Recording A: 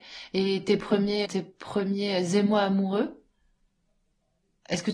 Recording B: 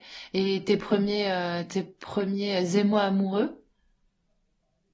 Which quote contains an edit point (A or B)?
A